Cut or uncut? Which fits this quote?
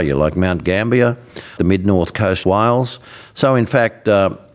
cut